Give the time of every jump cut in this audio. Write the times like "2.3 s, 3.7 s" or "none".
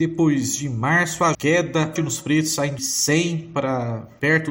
1.3 s, 2.0 s, 2.8 s